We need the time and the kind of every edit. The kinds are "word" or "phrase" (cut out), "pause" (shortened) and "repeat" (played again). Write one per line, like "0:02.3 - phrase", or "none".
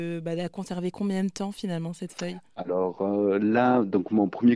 none